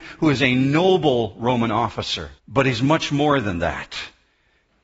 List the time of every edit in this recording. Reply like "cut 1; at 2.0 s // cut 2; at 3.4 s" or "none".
cut 1; at 2.4 s

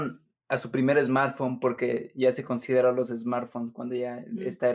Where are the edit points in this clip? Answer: none

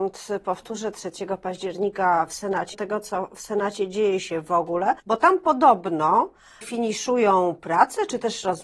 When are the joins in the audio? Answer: cut 1; at 2.7 s // cut 2; at 5.0 s // cut 3; at 6.6 s

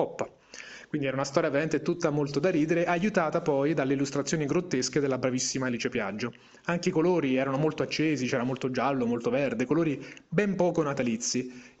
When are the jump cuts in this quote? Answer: none

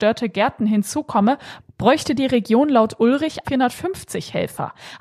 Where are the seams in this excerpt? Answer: cut 1; at 3.4 s

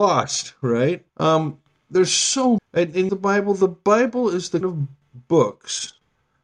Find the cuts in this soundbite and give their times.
cut 1; at 1.1 s // cut 2; at 2.6 s // cut 3; at 3.1 s // cut 4; at 4.6 s

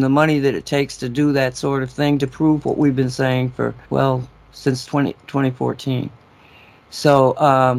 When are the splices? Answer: cut 1; at 3.9 s

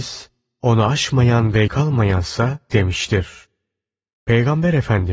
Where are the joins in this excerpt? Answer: cut 1; at 1.7 s // cut 2; at 2.7 s

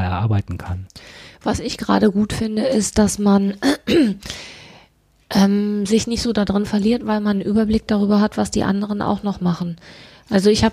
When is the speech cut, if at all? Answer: none

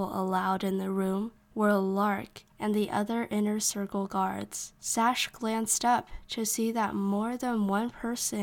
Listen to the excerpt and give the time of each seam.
cut 1; at 1.4 s // cut 2; at 2.5 s // cut 3; at 4.8 s

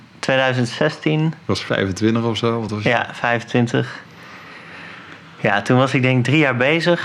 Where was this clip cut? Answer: none

